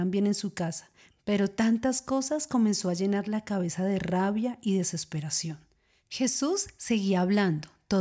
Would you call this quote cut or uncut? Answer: uncut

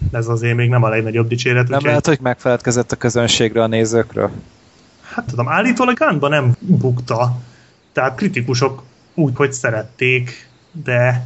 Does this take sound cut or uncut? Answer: cut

